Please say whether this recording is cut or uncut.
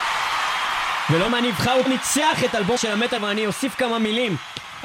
cut